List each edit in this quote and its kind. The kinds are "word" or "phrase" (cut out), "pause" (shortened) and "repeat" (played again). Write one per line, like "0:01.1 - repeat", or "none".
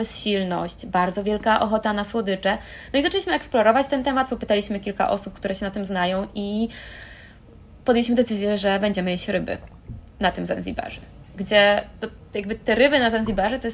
none

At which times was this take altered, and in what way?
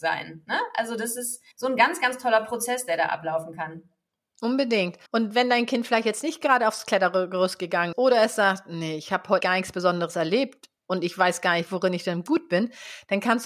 0:01.5 - pause
0:05.1 - pause
0:07.9 - word
0:09.4 - word

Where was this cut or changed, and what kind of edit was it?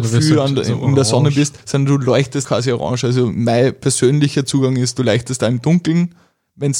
0:01.6 - pause
0:02.4 - word

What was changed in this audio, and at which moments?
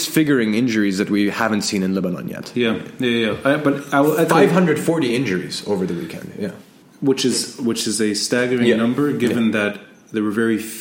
0:06.8 - pause

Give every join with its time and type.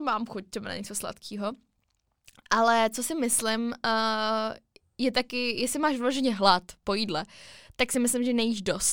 none

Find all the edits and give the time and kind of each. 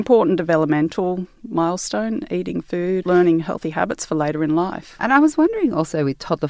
0:03.0 - word

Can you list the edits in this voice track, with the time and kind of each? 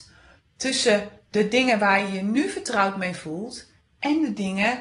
none

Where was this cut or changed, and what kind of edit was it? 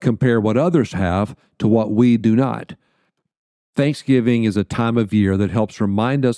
none

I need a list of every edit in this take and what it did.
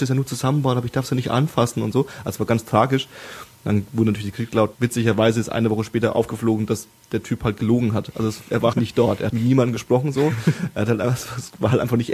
0:04.8 - pause
0:08.7 - word
0:09.3 - word

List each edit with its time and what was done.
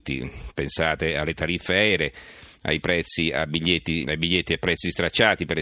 0:04.0 - word

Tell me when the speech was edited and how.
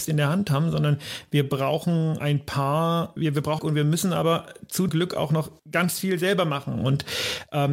0:02.2 - word
0:03.2 - word
0:03.6 - phrase
0:04.9 - word
0:05.6 - pause

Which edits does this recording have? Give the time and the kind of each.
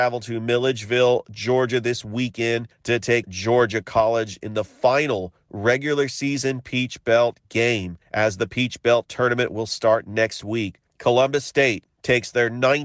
0:03.2 - word
0:08.0 - pause

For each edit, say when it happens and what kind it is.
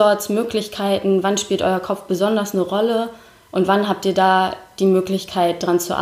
none

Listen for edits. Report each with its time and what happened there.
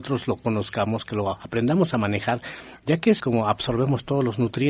0:03.2 - phrase

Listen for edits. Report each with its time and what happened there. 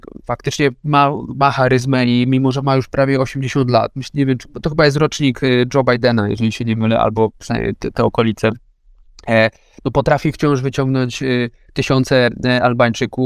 none

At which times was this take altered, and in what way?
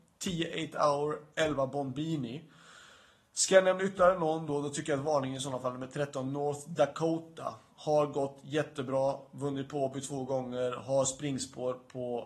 none

